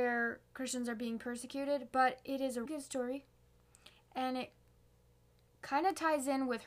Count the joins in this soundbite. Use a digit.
1